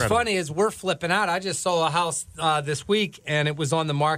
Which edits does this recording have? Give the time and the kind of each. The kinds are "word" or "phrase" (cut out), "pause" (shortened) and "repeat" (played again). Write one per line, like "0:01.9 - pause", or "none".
none

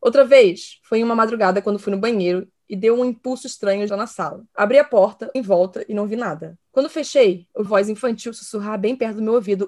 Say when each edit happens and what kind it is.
0:03.9 - word
0:04.5 - pause
0:05.3 - word
0:06.6 - pause
0:07.7 - word

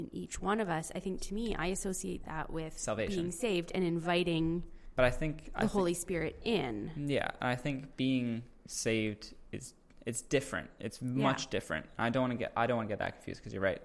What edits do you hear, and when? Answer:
none

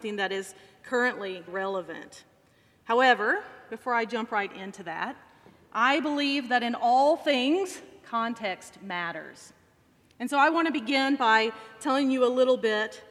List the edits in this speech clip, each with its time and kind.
0:01.5 - word

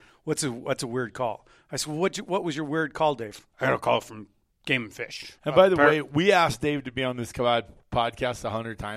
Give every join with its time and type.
0:03.5 - pause
0:04.5 - pause
0:05.4 - pause

